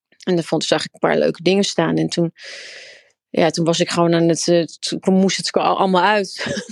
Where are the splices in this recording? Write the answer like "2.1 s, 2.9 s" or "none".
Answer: none